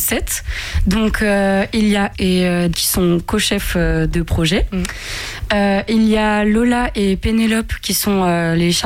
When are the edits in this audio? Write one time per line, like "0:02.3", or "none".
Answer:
0:02.1
0:02.7